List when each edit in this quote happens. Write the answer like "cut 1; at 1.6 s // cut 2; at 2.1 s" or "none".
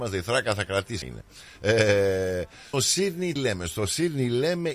cut 1; at 1.0 s // cut 2; at 2.7 s // cut 3; at 3.4 s